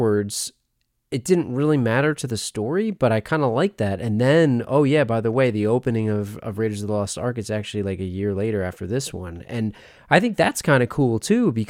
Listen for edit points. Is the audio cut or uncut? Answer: uncut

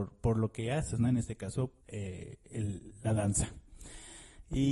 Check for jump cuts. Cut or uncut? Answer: cut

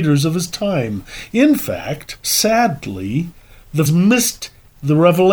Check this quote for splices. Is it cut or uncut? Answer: cut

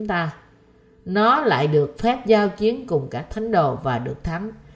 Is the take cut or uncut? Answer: uncut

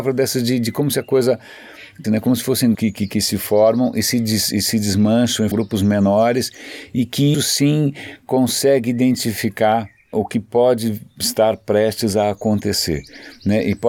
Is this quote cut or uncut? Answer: cut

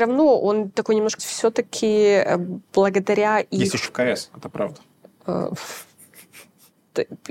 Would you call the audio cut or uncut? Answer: cut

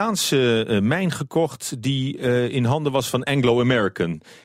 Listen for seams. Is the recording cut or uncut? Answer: uncut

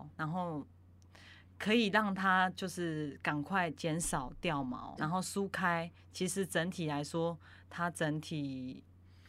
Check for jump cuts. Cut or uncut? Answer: cut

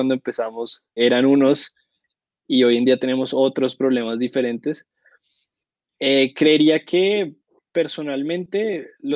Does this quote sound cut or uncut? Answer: cut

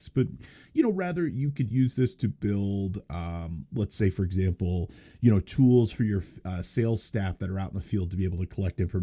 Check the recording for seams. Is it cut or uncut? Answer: uncut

